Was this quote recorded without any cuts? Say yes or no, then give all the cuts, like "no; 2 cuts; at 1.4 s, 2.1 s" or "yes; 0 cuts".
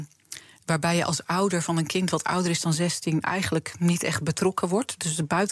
yes; 0 cuts